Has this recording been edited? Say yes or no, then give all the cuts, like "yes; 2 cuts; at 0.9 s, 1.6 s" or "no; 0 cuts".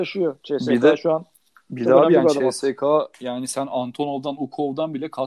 no; 0 cuts